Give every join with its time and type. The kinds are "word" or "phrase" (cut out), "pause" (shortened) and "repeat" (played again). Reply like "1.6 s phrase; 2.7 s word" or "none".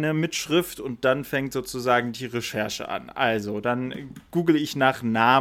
none